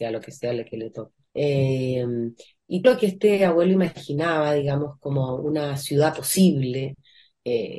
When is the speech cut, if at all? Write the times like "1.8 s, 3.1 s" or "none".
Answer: 1.3 s, 2.8 s

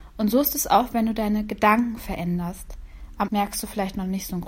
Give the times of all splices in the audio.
3.3 s

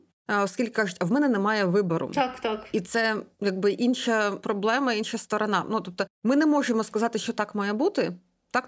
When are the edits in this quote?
none

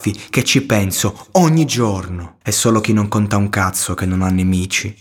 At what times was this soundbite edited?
2.4 s

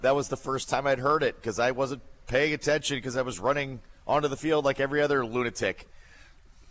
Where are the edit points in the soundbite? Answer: none

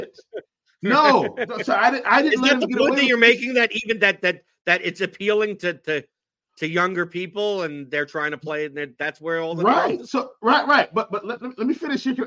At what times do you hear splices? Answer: none

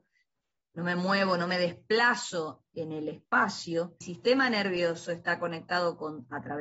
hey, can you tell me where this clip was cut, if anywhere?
4.0 s

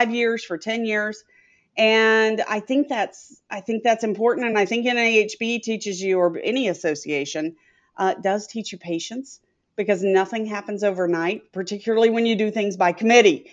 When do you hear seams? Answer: none

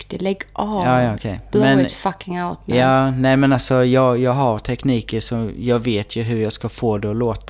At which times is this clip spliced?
none

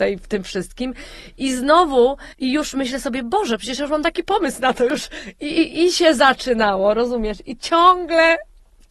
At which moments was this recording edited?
2.3 s

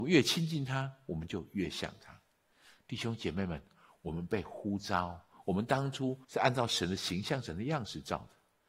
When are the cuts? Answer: 6.2 s

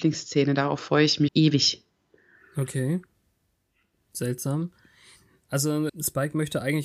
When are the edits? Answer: 1.3 s, 5.9 s

